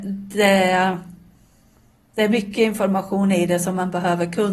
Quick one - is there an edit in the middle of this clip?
no; 0 cuts

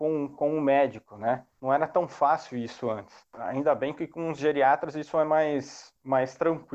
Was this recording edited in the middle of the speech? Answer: yes; 1 cut; at 1.5 s

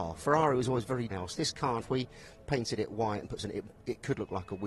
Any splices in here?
yes; 3 cuts; at 1.1 s, 1.8 s, 3.4 s

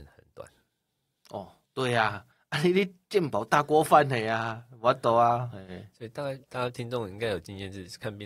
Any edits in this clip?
yes; 3 cuts; at 1.6 s, 2.3 s, 6.4 s

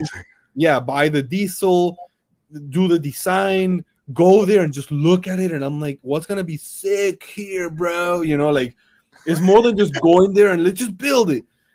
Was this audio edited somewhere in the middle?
no; 0 cuts

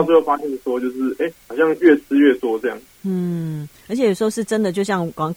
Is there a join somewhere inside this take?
yes; 1 cut; at 1.4 s

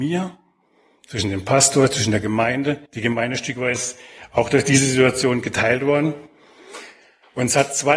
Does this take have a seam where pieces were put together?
yes; 1 cut; at 2.9 s

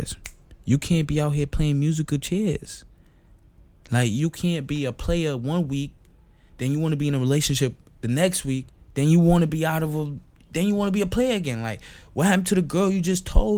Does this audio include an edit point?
no; 0 cuts

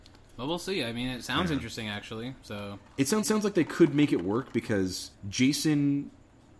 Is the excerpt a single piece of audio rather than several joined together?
no; 2 cuts; at 3.2 s, 5.1 s

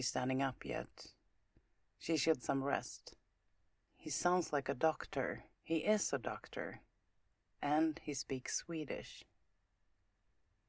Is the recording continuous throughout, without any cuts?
no; 3 cuts; at 2.4 s, 3.7 s, 5.5 s

